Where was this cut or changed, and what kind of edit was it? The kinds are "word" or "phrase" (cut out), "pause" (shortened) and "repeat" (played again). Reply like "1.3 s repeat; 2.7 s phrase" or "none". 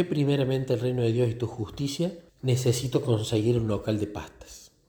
2.3 s pause